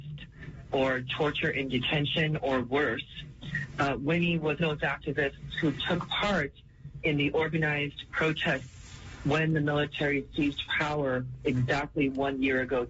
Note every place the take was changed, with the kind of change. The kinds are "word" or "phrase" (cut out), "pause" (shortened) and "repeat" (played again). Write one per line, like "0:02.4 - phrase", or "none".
0:04.6 - word

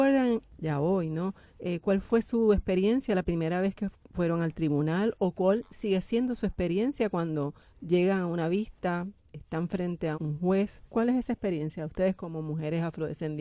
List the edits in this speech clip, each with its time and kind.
0:10.1 - word
0:10.9 - pause

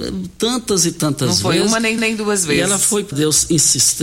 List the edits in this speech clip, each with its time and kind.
0:02.0 - repeat
0:03.1 - phrase

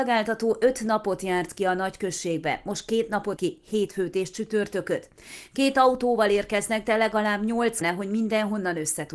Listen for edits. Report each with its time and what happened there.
0:03.4 - word
0:07.8 - word

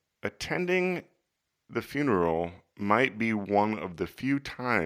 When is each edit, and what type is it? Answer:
none

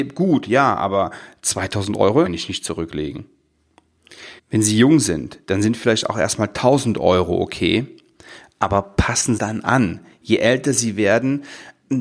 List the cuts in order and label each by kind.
0:02.3 - phrase
0:04.4 - pause
0:09.4 - phrase

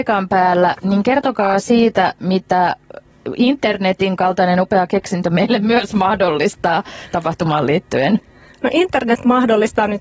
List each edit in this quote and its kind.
none

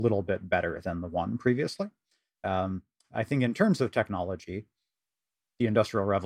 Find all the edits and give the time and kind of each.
none

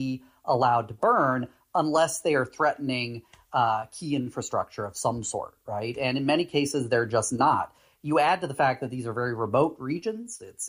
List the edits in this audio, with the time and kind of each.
none

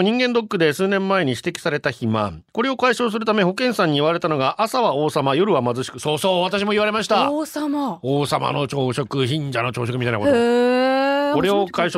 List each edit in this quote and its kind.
0:02.5 - pause

